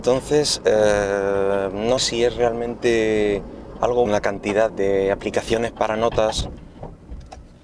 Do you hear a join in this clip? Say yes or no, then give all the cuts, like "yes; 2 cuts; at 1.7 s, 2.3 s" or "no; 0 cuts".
yes; 3 cuts; at 2.0 s, 4.1 s, 4.7 s